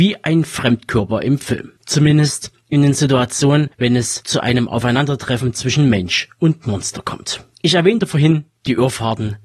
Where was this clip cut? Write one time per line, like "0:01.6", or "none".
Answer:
0:01.8
0:03.7
0:07.5